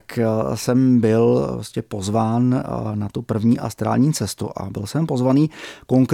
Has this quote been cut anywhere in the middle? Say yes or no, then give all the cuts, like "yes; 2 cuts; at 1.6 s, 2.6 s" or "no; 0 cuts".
no; 0 cuts